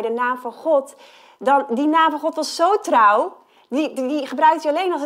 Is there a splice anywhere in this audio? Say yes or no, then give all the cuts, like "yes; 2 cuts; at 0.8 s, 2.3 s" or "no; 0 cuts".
no; 0 cuts